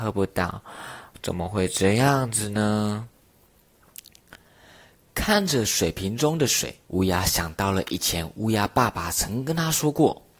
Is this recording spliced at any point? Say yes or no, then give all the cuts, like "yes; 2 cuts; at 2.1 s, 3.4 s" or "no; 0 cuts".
yes; 1 cut; at 6.8 s